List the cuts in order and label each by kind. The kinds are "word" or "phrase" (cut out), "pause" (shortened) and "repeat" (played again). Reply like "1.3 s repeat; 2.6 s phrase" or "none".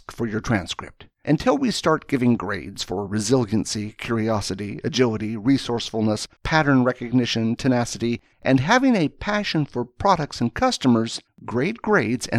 1.1 s pause; 6.4 s pause; 8.3 s pause; 11.3 s pause